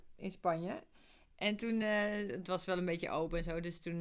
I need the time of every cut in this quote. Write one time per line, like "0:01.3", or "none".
none